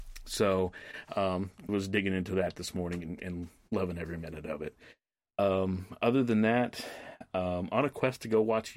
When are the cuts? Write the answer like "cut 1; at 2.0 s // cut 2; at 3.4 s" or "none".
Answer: cut 1; at 1.7 s